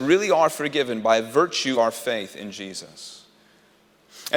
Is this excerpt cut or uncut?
cut